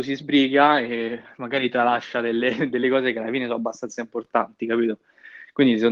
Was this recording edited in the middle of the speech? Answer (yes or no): no